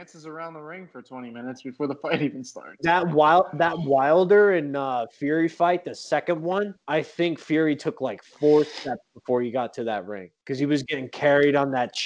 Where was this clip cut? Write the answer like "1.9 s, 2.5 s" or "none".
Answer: 6.8 s, 10.4 s